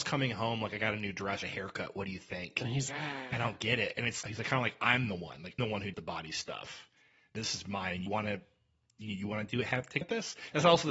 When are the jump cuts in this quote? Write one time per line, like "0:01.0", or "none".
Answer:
0:01.4
0:02.9
0:04.2
0:05.6
0:05.9
0:08.1
0:10.0